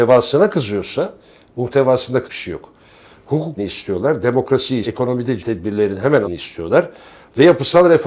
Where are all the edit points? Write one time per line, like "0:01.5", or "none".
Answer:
0:02.3
0:03.6
0:04.8
0:05.4
0:06.2